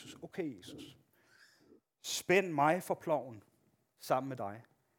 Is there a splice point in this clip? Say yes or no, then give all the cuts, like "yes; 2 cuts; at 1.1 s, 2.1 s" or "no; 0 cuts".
no; 0 cuts